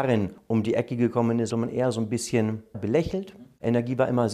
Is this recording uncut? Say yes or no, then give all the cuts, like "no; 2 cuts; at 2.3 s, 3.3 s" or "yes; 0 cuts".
no; 2 cuts; at 1.5 s, 2.7 s